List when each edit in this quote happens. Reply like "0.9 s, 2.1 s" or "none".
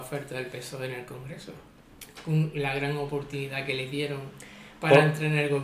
none